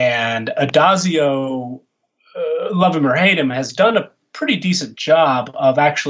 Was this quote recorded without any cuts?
yes; 0 cuts

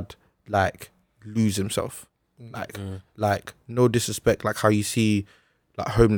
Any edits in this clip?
no; 0 cuts

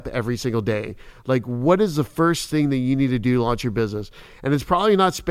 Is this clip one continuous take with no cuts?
yes; 0 cuts

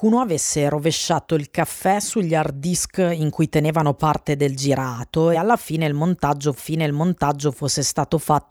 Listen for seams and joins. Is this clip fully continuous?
no; 2 cuts; at 5.3 s, 6.6 s

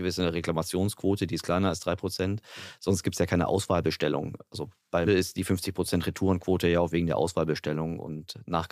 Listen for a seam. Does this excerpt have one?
yes; 1 cut; at 5.1 s

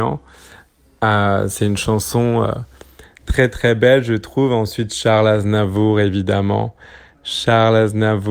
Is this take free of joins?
yes; 0 cuts

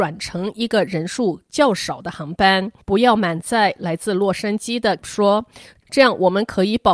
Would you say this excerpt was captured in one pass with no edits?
no; 2 cuts; at 2.8 s, 5.0 s

